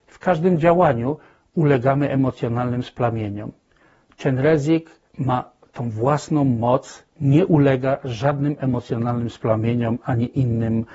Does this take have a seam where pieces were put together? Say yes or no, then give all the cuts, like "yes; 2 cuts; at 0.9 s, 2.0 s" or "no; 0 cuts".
yes; 2 cuts; at 5.1 s, 7.1 s